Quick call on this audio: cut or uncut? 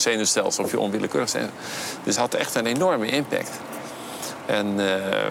cut